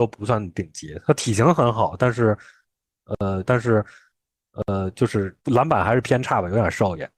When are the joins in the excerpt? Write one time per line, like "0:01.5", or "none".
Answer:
0:03.4
0:05.4